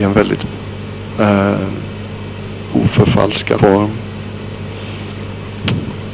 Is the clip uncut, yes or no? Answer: no